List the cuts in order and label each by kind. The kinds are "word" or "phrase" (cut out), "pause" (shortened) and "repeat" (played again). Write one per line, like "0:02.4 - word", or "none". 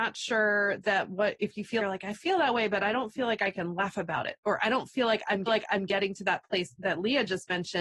0:01.8 - word
0:05.5 - repeat